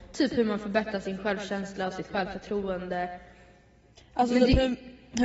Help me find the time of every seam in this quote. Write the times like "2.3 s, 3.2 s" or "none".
none